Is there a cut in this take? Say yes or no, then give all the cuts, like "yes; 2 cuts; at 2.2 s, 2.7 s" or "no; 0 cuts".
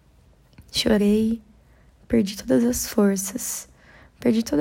no; 0 cuts